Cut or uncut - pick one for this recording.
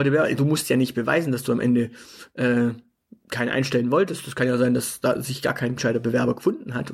uncut